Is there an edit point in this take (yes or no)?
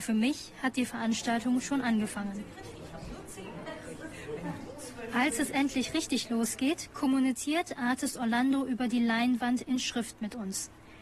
no